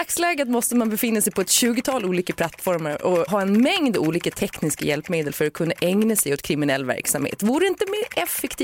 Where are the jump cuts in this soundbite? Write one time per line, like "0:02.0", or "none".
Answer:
0:03.3